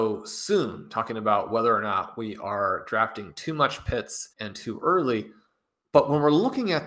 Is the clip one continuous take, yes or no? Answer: no